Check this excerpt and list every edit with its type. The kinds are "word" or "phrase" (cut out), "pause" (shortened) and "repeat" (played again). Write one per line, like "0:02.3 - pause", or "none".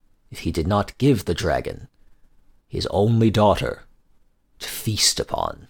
none